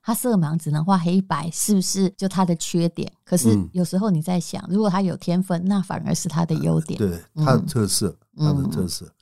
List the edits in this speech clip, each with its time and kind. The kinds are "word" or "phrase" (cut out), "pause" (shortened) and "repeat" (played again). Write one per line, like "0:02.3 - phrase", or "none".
0:02.1 - pause
0:07.0 - word

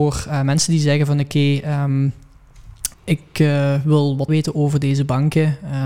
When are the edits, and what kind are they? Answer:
0:02.9 - pause
0:04.3 - word

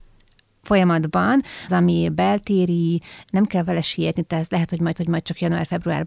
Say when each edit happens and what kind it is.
0:01.7 - phrase
0:04.9 - repeat

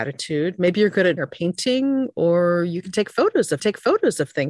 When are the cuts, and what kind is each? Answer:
0:01.2 - word
0:03.6 - repeat

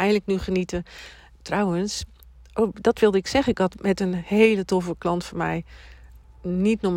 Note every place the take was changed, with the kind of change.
none

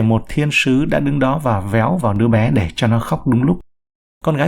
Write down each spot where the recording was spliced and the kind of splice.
none

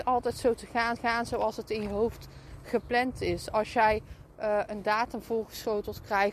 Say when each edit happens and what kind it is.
0:01.0 - repeat

